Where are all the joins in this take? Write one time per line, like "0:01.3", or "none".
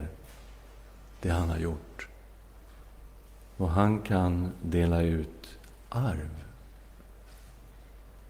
none